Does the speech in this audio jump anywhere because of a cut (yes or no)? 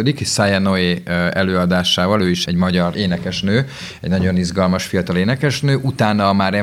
yes